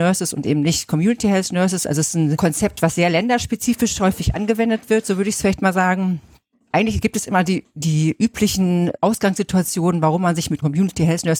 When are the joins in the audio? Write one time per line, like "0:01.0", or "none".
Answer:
none